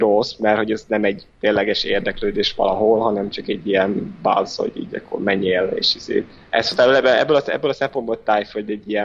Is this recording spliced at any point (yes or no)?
yes